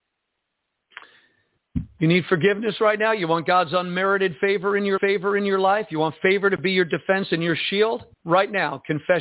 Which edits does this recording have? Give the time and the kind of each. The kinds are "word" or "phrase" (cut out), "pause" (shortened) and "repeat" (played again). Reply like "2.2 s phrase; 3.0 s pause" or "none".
5.0 s repeat; 8.1 s pause